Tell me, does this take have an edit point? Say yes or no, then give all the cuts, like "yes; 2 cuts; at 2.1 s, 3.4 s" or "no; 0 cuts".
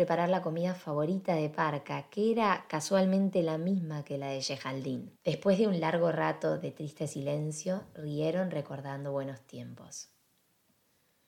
yes; 1 cut; at 5.2 s